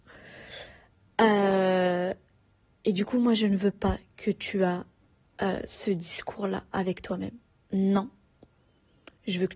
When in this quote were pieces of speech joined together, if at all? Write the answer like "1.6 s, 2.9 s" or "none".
none